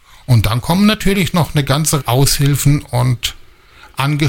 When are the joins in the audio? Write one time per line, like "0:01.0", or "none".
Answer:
0:02.0